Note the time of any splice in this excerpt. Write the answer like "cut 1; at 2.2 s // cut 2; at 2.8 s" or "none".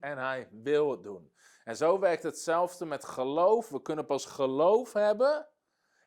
none